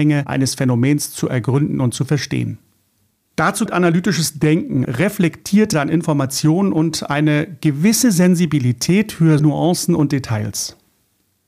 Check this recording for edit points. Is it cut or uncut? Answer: cut